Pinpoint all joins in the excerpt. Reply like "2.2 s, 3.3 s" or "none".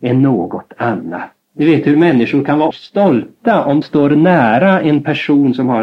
1.4 s, 2.7 s, 3.8 s